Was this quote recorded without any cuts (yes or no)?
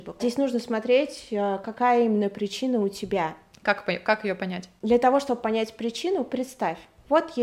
yes